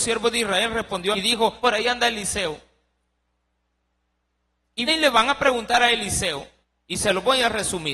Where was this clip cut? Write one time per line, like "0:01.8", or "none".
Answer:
0:01.1
0:01.6
0:04.9
0:06.6